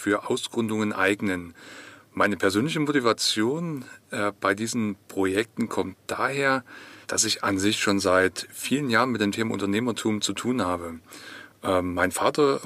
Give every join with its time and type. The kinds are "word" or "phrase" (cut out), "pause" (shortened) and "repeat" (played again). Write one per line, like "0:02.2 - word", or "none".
0:07.0 - pause